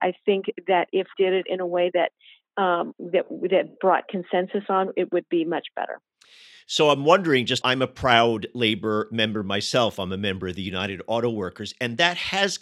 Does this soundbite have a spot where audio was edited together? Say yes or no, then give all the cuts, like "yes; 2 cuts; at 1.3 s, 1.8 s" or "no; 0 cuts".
yes; 2 cuts; at 1.1 s, 7.6 s